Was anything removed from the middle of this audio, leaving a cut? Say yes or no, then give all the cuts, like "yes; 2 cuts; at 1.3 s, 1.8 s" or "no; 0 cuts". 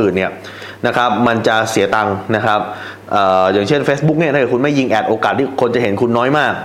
no; 0 cuts